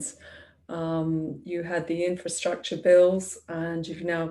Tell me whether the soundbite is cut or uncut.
uncut